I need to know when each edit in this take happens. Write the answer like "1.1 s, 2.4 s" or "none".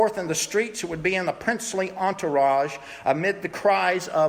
none